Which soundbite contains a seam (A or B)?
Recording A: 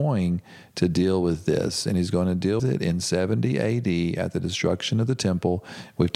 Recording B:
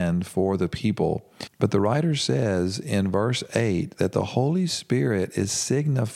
A